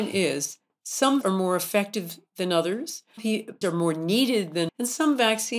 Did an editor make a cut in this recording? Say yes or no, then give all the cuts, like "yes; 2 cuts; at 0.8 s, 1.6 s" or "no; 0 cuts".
yes; 4 cuts; at 1.2 s, 3.2 s, 3.6 s, 4.7 s